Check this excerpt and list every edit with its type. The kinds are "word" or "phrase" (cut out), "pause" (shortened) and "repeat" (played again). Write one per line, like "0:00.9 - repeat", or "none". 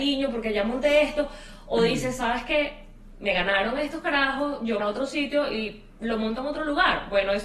0:04.8 - phrase

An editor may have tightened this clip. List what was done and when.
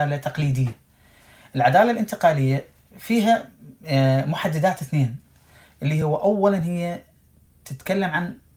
none

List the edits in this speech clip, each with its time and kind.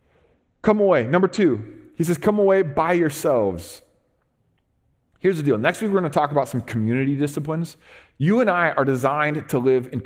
none

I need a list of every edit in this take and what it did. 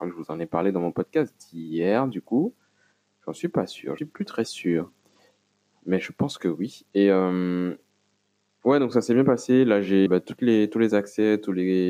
0:04.0 - word
0:10.1 - word

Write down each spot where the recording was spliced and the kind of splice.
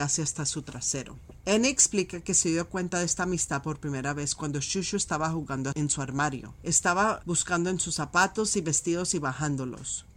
none

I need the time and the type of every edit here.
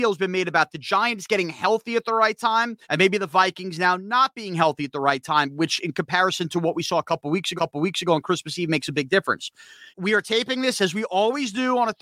0:02.8 - pause
0:07.6 - repeat
0:09.9 - pause

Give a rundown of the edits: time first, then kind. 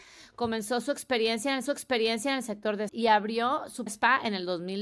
0:01.7 - repeat
0:02.9 - word
0:03.9 - word

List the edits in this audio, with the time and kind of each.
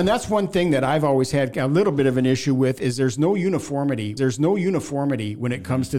0:04.2 - repeat

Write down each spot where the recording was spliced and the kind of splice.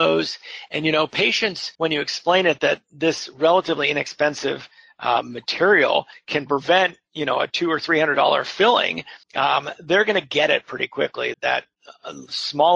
0:01.7 - pause
0:09.2 - pause
0:11.3 - word

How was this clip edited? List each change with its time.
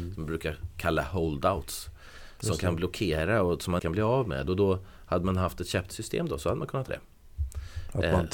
0:03.8 - word
0:05.9 - word
0:06.9 - word

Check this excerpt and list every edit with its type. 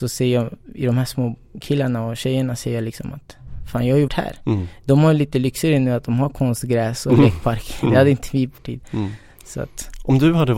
0:04.1 - word
0:08.6 - word

